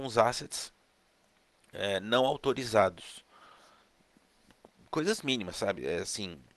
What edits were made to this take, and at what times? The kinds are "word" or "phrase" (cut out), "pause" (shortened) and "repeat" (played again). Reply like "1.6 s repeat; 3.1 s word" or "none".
none